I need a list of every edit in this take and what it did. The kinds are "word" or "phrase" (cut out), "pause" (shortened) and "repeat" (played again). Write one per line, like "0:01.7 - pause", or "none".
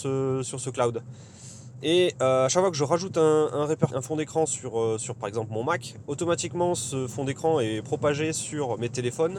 0:03.9 - word

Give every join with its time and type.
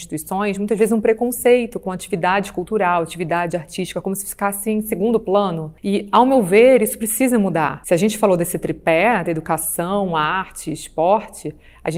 none

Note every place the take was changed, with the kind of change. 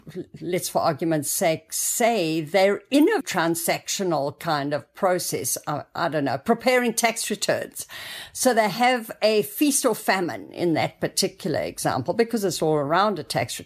0:03.2 - word

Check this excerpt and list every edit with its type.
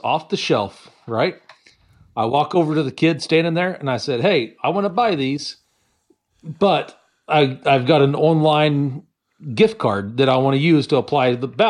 none

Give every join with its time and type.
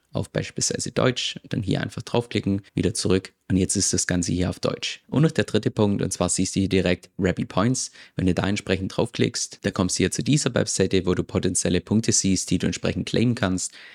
0:02.7 - pause

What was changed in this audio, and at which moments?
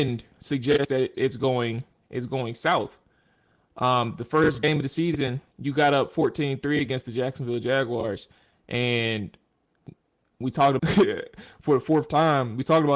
0:01.1 - word
0:05.5 - pause
0:10.8 - word

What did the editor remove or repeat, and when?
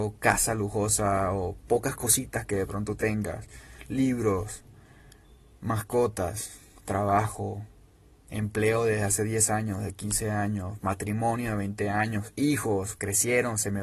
none

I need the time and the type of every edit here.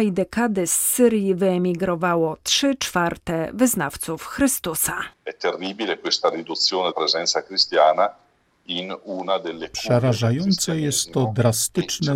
0:06.9 - word

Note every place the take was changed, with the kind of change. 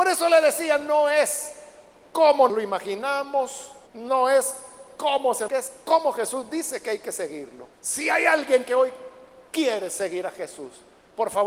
0:02.5 - word
0:03.9 - pause
0:05.5 - phrase
0:07.7 - pause

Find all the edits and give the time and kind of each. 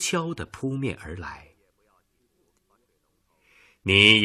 none

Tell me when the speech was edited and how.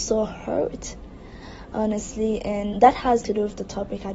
0:02.7 - word
0:03.2 - word

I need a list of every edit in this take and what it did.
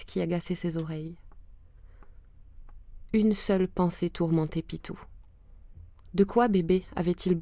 none

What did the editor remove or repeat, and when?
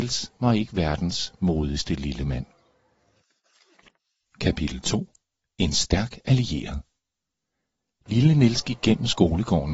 none

